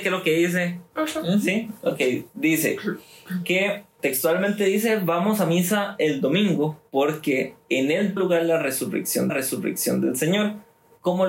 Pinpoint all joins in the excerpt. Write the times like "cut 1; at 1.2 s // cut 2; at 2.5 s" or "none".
cut 1; at 4.0 s // cut 2; at 7.6 s // cut 3; at 8.2 s // cut 4; at 9.3 s